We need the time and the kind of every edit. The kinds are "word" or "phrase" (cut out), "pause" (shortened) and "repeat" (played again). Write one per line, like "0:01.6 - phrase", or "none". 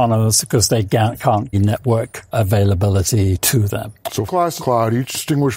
0:01.5 - word
0:02.3 - word
0:04.3 - word
0:04.6 - word